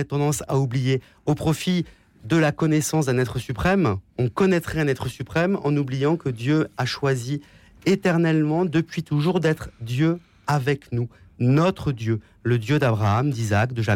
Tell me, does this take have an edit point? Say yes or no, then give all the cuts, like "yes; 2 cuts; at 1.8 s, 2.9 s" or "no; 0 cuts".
no; 0 cuts